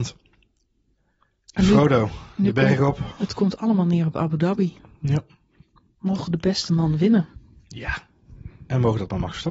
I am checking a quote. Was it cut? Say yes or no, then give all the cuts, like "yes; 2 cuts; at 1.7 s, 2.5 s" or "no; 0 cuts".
no; 0 cuts